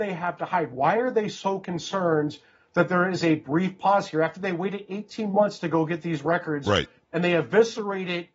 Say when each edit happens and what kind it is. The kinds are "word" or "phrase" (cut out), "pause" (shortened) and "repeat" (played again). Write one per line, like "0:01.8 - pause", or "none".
none